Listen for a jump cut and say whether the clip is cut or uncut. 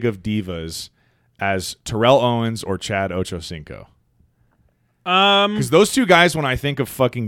uncut